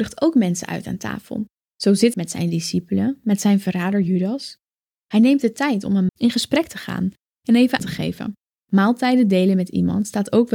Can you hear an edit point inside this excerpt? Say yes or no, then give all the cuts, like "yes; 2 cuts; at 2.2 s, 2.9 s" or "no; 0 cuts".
yes; 3 cuts; at 2.1 s, 6.1 s, 7.8 s